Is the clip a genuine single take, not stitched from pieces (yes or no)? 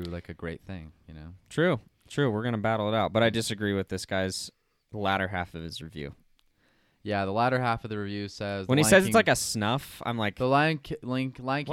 yes